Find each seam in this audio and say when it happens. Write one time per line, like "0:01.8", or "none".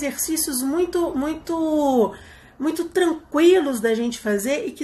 none